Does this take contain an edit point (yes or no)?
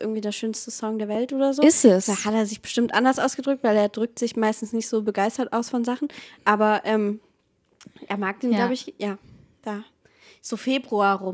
no